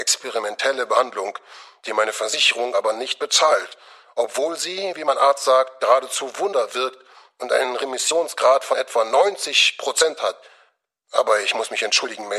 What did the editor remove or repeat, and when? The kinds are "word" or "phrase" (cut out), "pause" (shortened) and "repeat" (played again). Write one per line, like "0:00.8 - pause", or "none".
none